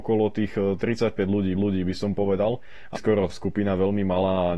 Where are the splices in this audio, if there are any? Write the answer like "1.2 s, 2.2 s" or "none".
1.5 s, 2.9 s, 3.3 s